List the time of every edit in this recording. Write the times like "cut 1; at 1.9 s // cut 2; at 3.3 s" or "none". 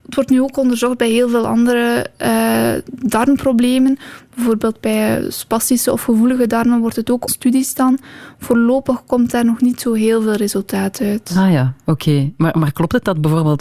cut 1; at 7.3 s